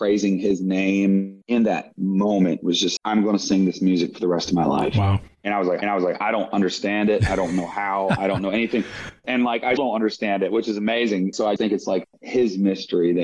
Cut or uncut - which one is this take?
cut